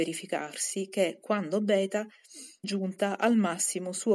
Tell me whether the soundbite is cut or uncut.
cut